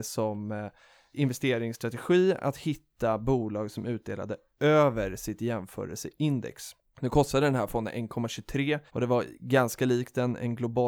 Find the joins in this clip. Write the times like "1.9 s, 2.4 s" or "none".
8.9 s